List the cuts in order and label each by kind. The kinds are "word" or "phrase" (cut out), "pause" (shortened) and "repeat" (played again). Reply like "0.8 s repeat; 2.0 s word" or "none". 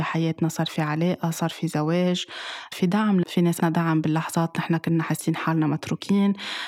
2.7 s word; 3.2 s word; 3.6 s word